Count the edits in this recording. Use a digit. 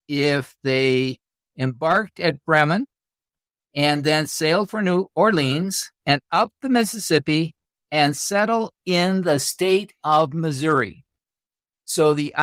1